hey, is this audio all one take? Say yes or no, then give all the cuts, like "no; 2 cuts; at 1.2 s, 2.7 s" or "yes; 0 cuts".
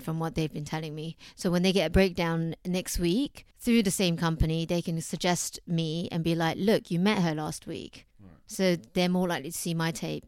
no; 2 cuts; at 3.5 s, 8.1 s